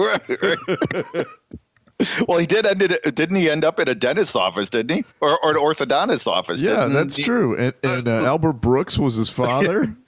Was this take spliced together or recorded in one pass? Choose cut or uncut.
cut